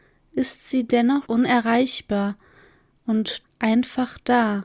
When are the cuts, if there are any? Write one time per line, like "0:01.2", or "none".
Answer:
0:01.3
0:03.4